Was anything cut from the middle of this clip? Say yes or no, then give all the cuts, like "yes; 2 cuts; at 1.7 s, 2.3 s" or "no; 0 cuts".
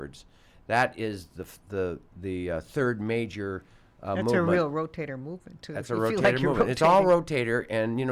no; 0 cuts